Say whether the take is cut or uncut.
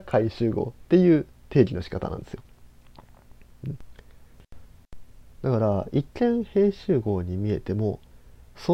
cut